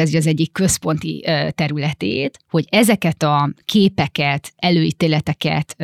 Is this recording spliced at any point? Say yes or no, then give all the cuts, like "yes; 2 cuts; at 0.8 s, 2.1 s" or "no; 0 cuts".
no; 0 cuts